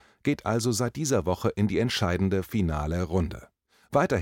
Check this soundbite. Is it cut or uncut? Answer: uncut